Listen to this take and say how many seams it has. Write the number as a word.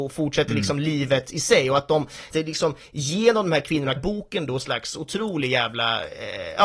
three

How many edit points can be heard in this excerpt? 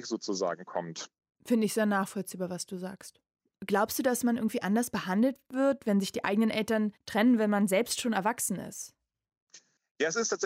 one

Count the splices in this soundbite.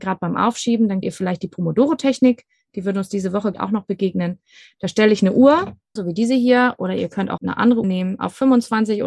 five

